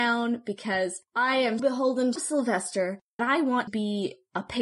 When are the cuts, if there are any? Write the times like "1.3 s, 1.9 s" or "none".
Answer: 1.1 s, 1.6 s, 2.2 s, 3.2 s, 3.7 s